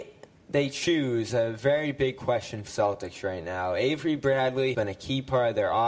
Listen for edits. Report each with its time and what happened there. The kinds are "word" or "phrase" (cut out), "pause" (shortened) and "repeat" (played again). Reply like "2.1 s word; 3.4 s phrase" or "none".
1.3 s word; 2.7 s word; 4.7 s word

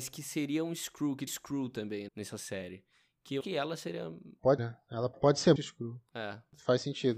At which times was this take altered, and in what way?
1.3 s word; 2.1 s word; 3.4 s word; 4.6 s word; 5.1 s word; 5.6 s word

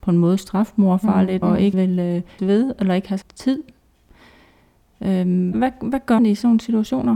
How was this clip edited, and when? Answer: 1.4 s word; 1.7 s word; 2.4 s word; 3.2 s word; 5.5 s word; 6.2 s word

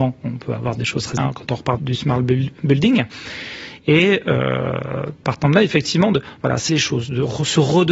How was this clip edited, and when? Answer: 1.2 s phrase; 1.8 s word; 6.7 s phrase

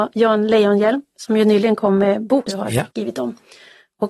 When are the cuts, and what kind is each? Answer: 2.5 s word; 2.9 s pause

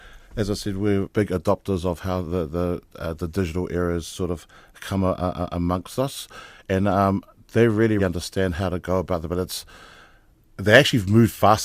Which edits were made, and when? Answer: 1.0 s word; 8.0 s word

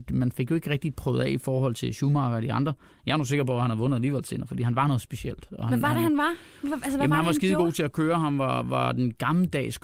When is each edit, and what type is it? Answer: none

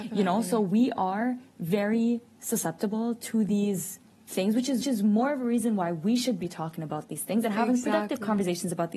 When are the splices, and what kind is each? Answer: 4.8 s repeat

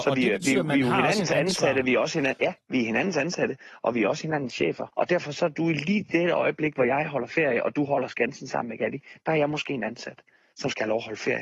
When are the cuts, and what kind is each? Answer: 4.9 s pause

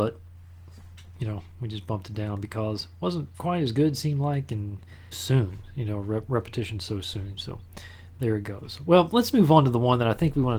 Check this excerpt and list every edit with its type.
1.1 s pause; 5.1 s word

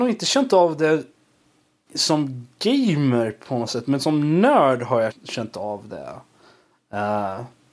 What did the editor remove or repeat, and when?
1.9 s word; 5.1 s word

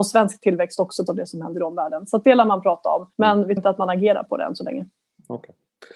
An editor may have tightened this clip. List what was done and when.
1.1 s phrase; 3.1 s pause; 3.6 s word

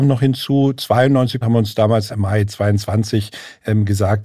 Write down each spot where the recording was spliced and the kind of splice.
1.4 s word; 2.1 s word

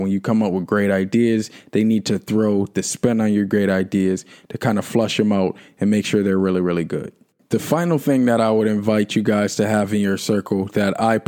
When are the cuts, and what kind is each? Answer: none

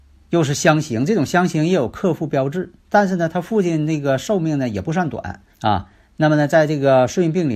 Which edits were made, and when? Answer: 5.5 s pause

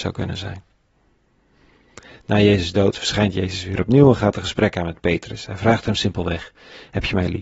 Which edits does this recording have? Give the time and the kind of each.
none

